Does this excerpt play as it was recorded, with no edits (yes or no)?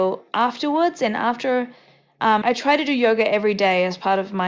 no